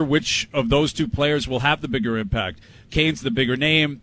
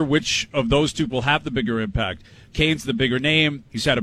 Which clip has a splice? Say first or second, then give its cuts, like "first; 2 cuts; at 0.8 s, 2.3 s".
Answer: second; 1 cut; at 1.1 s